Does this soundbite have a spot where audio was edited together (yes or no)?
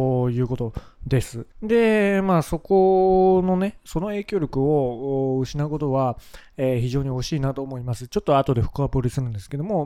yes